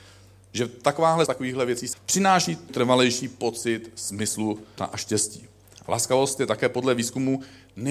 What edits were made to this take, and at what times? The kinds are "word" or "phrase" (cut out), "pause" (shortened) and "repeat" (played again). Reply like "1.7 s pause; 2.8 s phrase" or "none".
1.3 s word; 1.9 s word; 2.7 s word; 4.8 s word